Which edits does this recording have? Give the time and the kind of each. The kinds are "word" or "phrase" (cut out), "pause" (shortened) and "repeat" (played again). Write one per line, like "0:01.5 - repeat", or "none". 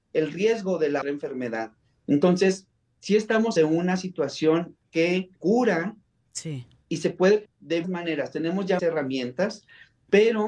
0:01.0 - word
0:03.6 - word
0:05.4 - word
0:07.4 - word
0:07.8 - word
0:08.8 - word